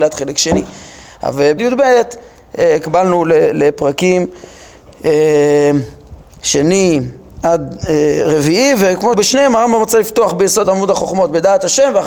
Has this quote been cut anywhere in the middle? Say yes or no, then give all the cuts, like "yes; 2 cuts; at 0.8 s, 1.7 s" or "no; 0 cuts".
yes; 3 cuts; at 1.6 s, 9.1 s, 10.6 s